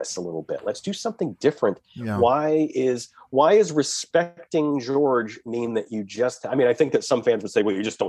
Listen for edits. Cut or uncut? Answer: uncut